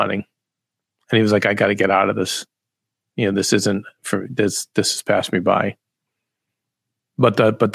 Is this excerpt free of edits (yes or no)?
yes